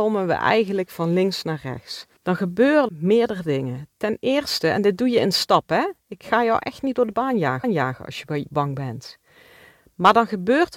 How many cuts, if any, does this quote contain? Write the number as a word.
three